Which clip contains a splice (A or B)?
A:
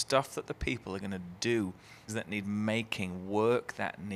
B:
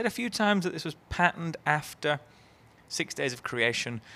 A